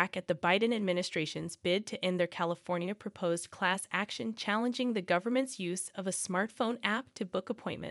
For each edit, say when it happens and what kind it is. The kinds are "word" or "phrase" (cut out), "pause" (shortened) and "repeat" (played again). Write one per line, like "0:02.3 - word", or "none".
none